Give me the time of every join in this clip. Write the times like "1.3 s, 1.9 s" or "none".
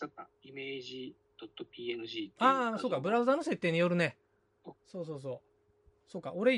4.8 s

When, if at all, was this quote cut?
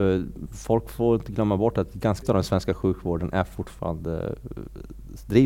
2.2 s

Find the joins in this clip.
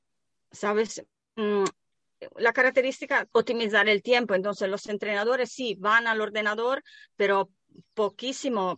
3.3 s

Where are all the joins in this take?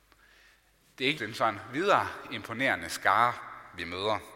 1.2 s

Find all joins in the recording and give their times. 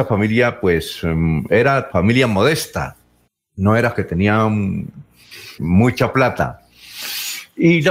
1.9 s, 3.3 s, 5.6 s

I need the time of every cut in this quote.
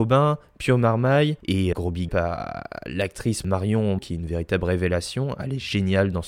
1.7 s, 2.1 s, 3.4 s, 4.0 s

